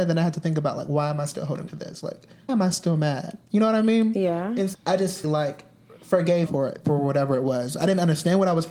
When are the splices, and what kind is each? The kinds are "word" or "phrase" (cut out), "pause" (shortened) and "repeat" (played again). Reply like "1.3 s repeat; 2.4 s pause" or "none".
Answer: 1.7 s word; 2.5 s word; 4.7 s word; 5.2 s word; 6.5 s word